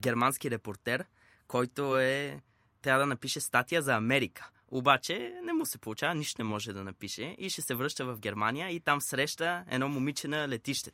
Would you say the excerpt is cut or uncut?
uncut